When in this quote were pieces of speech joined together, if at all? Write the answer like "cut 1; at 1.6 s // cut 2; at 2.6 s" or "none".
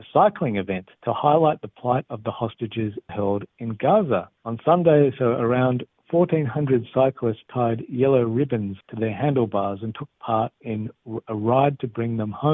cut 1; at 1.0 s // cut 2; at 3.1 s // cut 3; at 4.4 s // cut 4; at 8.8 s